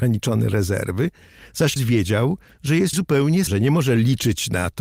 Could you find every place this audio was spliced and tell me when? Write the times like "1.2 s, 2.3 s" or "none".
1.8 s, 2.9 s, 3.5 s